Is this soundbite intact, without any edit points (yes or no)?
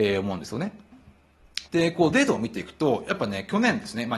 no